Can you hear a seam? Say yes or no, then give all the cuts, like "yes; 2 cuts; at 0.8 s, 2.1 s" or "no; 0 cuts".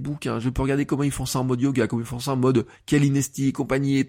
no; 0 cuts